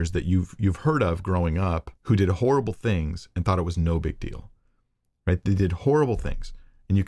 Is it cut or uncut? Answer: cut